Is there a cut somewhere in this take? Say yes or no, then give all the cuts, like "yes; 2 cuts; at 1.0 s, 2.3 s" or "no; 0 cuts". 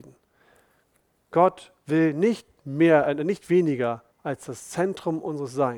yes; 1 cut; at 4.1 s